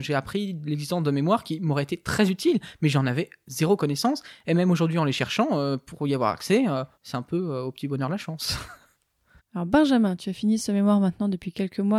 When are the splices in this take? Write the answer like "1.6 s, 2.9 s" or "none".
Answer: 6.9 s

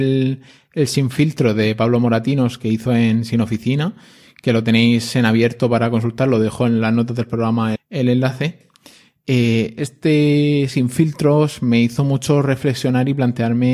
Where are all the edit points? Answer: 7.8 s

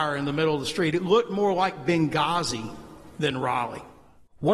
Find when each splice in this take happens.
none

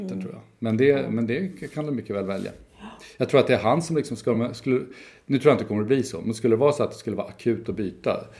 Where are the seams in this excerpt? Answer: none

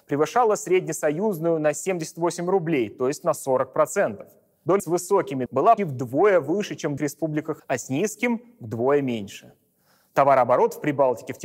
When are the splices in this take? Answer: 4.8 s, 5.5 s, 5.8 s, 7.0 s, 7.6 s

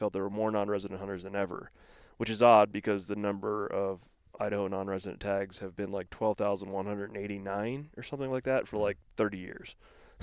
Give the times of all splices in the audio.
none

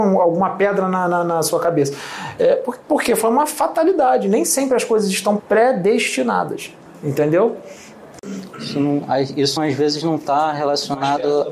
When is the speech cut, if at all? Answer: 5.4 s, 9.6 s

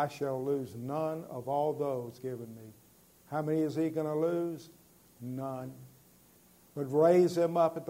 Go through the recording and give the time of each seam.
2.2 s

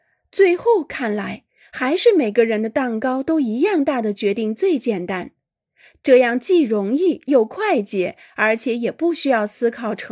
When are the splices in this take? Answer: none

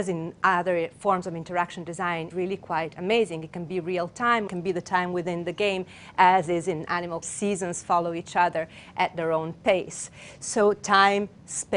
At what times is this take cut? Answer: 2.3 s, 4.5 s, 7.2 s

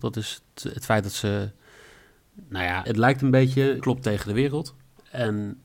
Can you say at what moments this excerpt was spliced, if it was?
2.8 s, 3.8 s

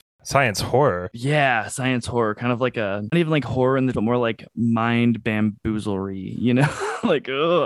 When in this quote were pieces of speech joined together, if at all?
3.1 s, 3.9 s

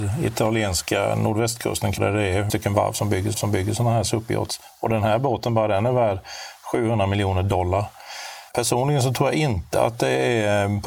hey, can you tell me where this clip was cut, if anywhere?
2.0 s, 2.5 s, 3.3 s, 8.5 s

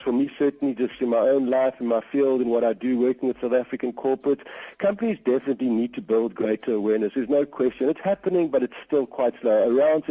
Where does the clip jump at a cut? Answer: none

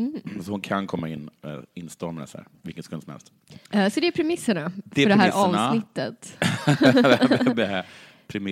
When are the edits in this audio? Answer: 3.7 s

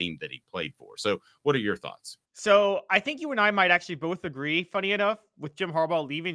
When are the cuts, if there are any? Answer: 2.2 s

